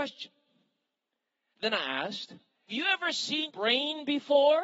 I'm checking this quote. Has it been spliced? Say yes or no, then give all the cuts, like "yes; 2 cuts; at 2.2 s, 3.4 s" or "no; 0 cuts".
yes; 2 cuts; at 2.7 s, 3.5 s